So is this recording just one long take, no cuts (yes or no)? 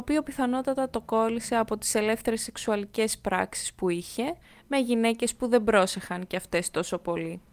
yes